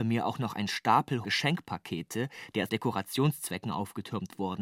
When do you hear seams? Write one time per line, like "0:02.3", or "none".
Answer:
0:01.2
0:02.7